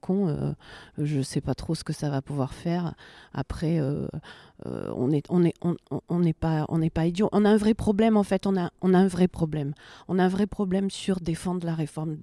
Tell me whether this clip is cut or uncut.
uncut